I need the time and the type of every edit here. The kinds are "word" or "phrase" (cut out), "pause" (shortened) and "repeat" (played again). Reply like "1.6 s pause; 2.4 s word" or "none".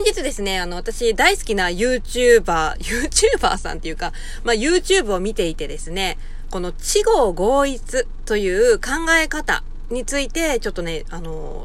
none